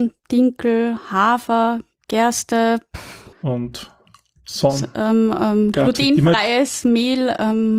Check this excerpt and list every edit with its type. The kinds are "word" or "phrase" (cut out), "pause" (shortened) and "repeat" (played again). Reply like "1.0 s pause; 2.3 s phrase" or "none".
3.3 s pause